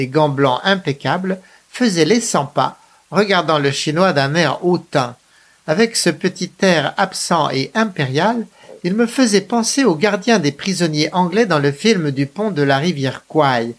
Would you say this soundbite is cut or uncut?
uncut